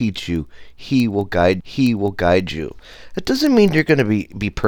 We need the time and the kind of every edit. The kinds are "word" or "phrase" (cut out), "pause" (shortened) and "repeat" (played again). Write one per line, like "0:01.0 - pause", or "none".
0:01.6 - repeat